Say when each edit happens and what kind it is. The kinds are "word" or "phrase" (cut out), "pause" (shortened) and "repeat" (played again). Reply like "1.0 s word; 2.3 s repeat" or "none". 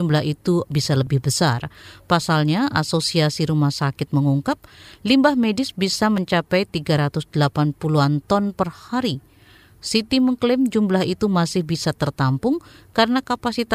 none